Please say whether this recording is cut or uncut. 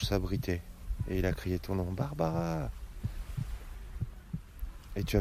uncut